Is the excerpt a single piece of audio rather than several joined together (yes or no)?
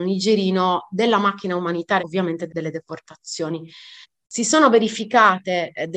no